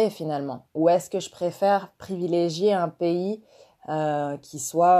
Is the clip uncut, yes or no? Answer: yes